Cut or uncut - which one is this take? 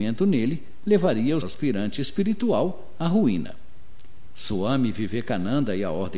cut